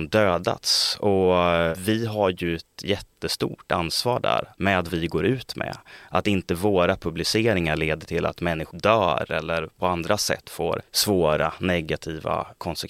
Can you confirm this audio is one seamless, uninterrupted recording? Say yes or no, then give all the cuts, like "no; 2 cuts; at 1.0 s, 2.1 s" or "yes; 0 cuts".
no; 2 cuts; at 4.9 s, 8.7 s